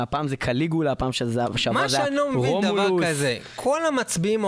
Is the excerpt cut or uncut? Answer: uncut